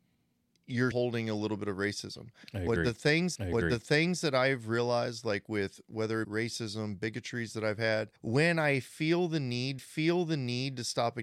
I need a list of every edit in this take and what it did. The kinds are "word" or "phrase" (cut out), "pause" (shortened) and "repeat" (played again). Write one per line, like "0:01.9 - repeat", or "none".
0:00.9 - word
0:03.4 - repeat
0:06.2 - phrase
0:08.2 - pause
0:09.8 - repeat